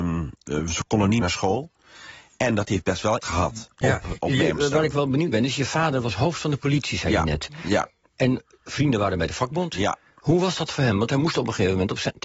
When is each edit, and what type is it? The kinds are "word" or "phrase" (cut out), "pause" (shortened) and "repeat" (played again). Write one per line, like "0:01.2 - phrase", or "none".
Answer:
0:01.2 - word
0:03.2 - word
0:05.3 - word

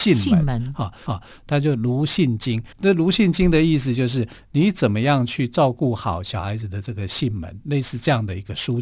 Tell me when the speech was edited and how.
0:01.1 - repeat
0:02.7 - pause

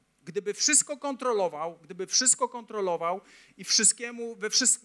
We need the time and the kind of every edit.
none

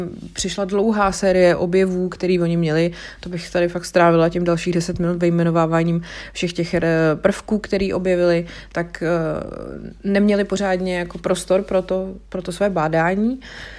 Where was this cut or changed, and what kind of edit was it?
none

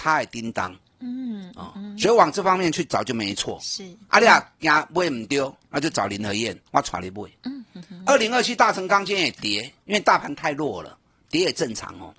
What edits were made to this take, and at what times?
0:06.7 - pause
0:09.8 - pause

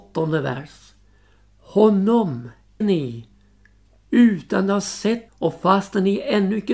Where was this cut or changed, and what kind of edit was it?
0:02.8 - word
0:05.3 - word

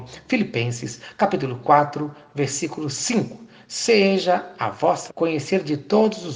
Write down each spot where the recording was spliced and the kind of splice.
0:05.1 - word

